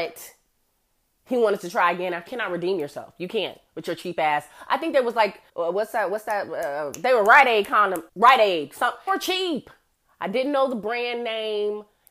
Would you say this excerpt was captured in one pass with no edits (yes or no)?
no